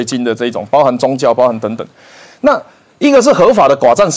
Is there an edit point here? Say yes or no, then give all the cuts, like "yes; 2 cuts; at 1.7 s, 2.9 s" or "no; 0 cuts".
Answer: no; 0 cuts